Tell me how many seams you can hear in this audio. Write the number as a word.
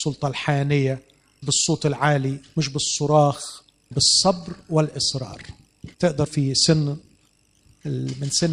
four